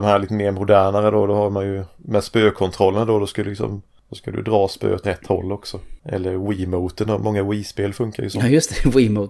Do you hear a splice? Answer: yes; 2 cuts; at 5.0 s, 6.0 s

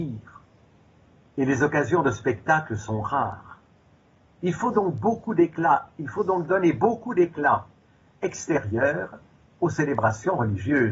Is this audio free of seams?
yes; 0 cuts

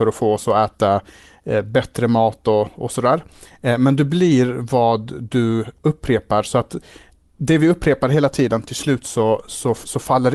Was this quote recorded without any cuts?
yes; 0 cuts

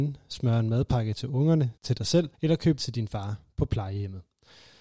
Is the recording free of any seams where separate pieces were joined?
no; 3 cuts; at 1.8 s, 2.3 s, 2.8 s

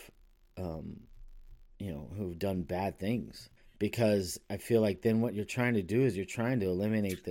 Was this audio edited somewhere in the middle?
yes; 1 cut; at 3.6 s

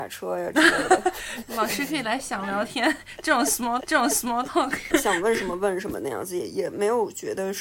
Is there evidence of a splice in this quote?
yes; 2 cuts; at 3.8 s, 4.9 s

